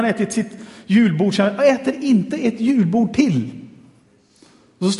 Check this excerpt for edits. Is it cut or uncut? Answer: uncut